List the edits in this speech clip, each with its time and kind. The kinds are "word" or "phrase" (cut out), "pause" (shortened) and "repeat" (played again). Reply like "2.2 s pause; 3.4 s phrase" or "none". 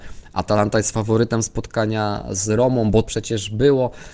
3.0 s word